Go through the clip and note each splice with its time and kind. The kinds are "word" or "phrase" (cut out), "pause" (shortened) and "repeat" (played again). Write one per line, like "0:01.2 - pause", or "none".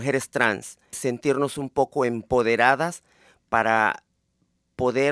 0:00.9 - word